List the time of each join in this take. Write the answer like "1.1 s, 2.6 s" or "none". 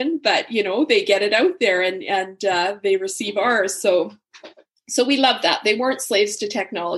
none